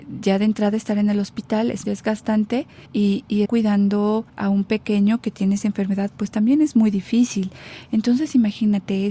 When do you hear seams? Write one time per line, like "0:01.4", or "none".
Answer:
0:01.8
0:02.9
0:03.5
0:04.3